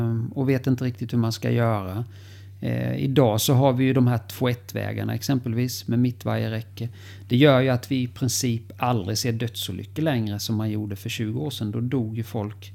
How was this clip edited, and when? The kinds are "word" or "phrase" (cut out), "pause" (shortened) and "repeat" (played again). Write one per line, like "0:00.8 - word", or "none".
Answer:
none